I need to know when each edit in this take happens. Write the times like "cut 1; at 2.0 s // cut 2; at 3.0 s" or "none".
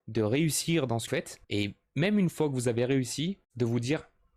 cut 1; at 1.1 s // cut 2; at 1.4 s // cut 3; at 3.4 s